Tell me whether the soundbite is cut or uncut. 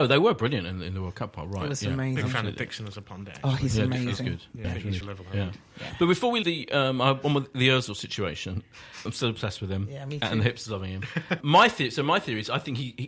cut